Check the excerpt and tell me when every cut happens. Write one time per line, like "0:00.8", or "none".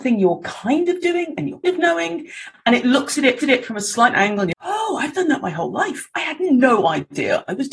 0:01.6
0:03.4
0:04.1
0:04.5

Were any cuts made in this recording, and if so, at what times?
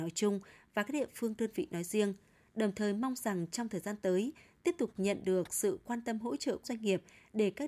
0:06.6

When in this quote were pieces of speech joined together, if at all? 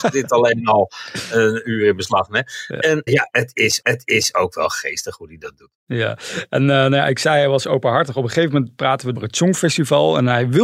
0:03.1
0:03.8
0:09.2

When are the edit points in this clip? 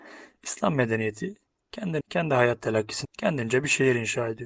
0:02.0
0:03.0

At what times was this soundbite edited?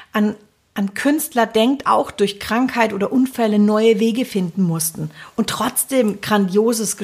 0:01.8

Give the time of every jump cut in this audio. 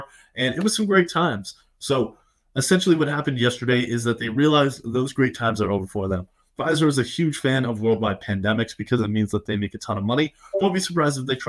none

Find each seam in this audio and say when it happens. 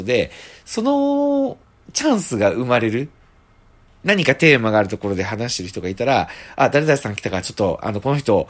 none

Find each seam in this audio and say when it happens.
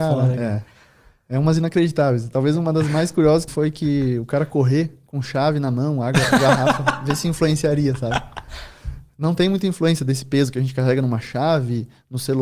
0:03.5

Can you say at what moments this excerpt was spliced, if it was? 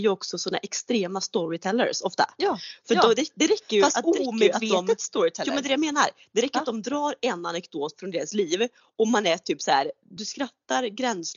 none

